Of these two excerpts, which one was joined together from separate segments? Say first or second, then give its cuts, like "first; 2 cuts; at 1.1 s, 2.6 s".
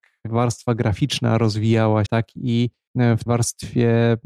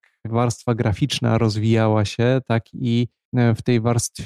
first; 2 cuts; at 2.1 s, 3.3 s